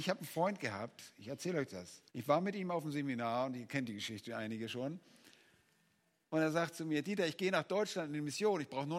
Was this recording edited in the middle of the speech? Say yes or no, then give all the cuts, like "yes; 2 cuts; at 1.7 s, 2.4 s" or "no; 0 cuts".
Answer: yes; 1 cut; at 2.1 s